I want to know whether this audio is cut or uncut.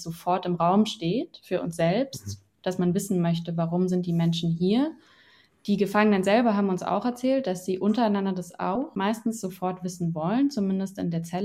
uncut